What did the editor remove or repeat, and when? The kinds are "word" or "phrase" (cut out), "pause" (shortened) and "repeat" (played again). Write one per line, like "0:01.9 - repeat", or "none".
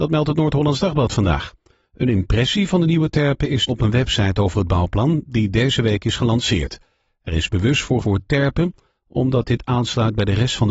0:03.7 - word
0:08.0 - word